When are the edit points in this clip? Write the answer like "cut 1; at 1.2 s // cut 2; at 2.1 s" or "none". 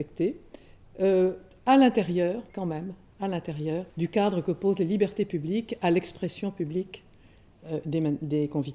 cut 1; at 2.5 s // cut 2; at 3.9 s